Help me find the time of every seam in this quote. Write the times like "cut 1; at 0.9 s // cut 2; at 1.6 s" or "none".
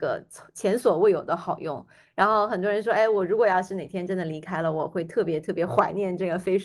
none